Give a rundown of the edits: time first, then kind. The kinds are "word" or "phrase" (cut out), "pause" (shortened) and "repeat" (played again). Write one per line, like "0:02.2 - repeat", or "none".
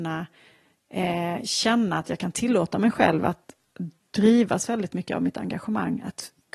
none